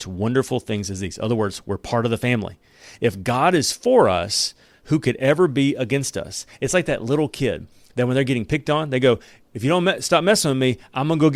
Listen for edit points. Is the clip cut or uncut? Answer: uncut